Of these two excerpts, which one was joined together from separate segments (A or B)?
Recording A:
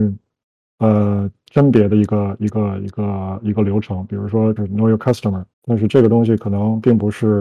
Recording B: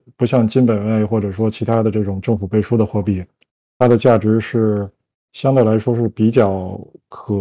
A